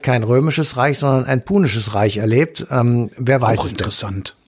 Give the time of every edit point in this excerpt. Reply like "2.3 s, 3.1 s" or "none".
none